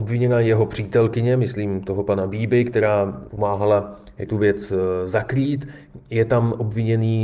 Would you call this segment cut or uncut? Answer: cut